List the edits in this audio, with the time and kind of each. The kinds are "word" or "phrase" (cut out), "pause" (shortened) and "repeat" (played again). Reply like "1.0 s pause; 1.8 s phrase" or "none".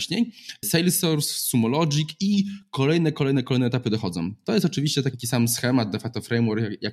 none